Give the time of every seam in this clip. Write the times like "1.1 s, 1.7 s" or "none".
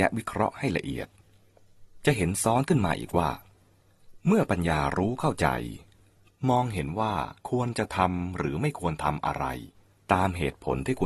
7.4 s

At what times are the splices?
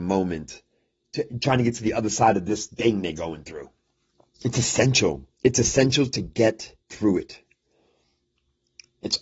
4.1 s, 5.3 s, 6.8 s

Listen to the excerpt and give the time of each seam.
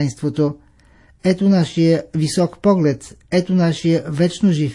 none

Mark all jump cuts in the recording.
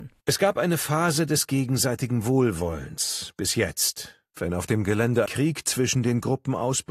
5.3 s

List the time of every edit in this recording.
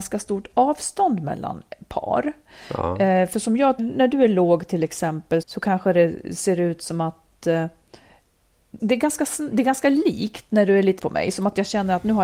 3.8 s, 5.4 s, 8.8 s, 11.0 s

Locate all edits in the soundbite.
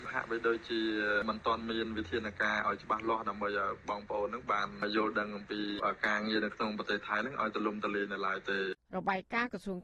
8.8 s

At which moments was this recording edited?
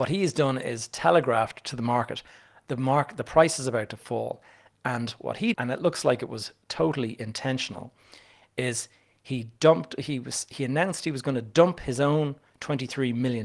5.5 s

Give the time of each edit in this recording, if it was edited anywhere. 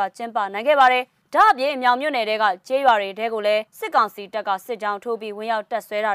3.7 s

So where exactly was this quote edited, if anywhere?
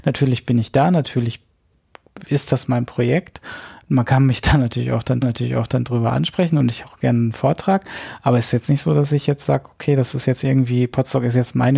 5.2 s, 6.8 s

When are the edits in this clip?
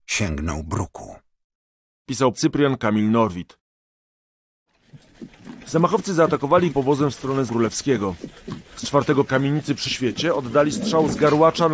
2.3 s, 6.7 s, 7.5 s, 9.3 s, 9.9 s

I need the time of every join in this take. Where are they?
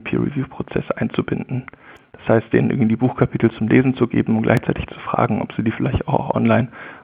none

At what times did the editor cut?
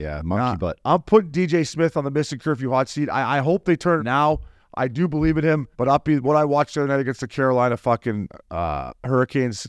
4.0 s, 5.7 s

